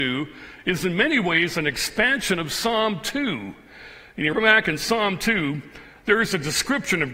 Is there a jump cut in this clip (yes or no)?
yes